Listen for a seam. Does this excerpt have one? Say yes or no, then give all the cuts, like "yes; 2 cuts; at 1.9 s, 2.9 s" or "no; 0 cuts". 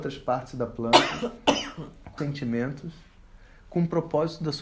yes; 1 cut; at 2.2 s